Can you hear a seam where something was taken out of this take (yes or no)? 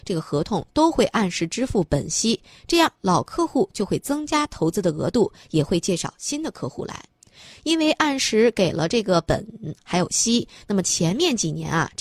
no